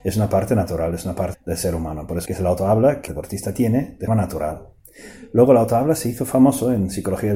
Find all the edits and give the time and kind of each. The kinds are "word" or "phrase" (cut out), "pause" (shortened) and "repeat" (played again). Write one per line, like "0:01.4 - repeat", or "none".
0:01.3 - word
0:02.3 - phrase
0:03.1 - phrase
0:04.1 - word